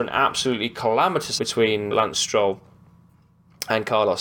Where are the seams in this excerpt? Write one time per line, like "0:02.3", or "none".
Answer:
0:01.4
0:01.9